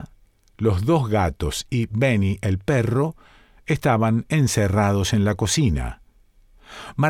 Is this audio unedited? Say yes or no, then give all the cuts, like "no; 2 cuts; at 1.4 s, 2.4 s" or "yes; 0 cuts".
yes; 0 cuts